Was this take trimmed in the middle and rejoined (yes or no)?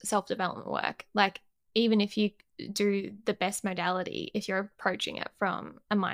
no